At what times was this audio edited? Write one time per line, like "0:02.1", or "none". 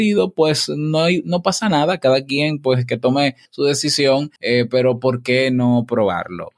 0:03.5
0:04.4